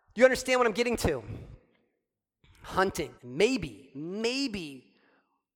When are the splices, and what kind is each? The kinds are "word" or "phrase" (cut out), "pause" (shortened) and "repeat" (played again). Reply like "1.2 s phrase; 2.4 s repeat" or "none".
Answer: 3.2 s pause